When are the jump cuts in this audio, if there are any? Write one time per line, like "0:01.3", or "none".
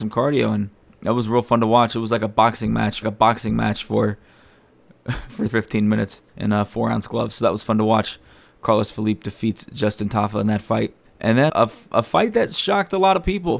0:03.0
0:05.5
0:06.3
0:11.0
0:11.5